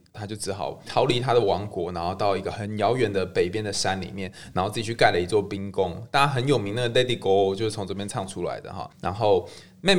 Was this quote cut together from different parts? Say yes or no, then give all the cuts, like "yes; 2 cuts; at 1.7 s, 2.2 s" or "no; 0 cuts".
no; 0 cuts